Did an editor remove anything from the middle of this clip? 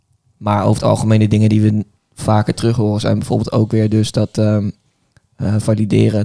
no; 0 cuts

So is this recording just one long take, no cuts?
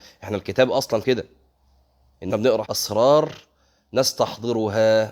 no; 3 cuts; at 1.0 s, 2.3 s, 2.6 s

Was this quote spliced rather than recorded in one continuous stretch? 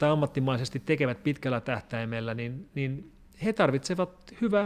no; 0 cuts

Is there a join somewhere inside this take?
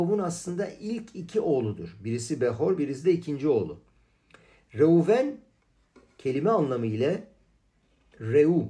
no; 0 cuts

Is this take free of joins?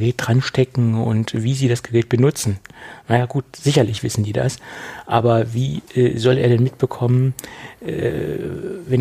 yes; 0 cuts

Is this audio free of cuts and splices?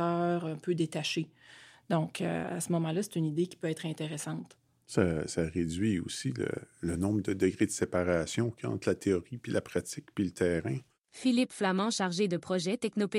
yes; 0 cuts

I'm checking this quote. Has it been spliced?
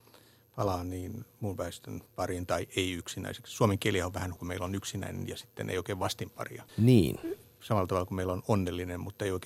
yes; 3 cuts; at 2.1 s, 4.4 s, 6.7 s

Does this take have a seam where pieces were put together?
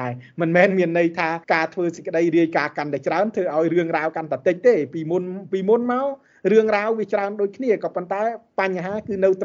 yes; 1 cut; at 1.4 s

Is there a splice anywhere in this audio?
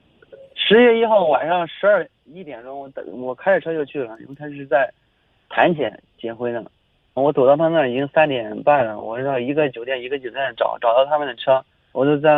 yes; 1 cut; at 7.2 s

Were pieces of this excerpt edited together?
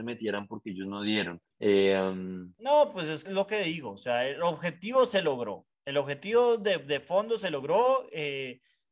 yes; 3 cuts; at 1.5 s, 3.2 s, 5.7 s

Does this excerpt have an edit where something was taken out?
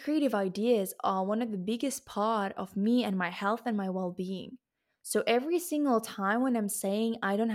no; 0 cuts

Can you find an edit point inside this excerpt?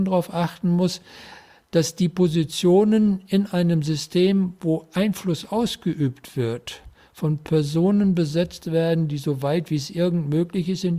no; 0 cuts

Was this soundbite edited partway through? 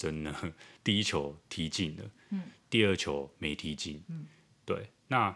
no; 0 cuts

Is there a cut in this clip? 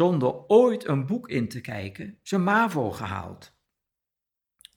no; 0 cuts

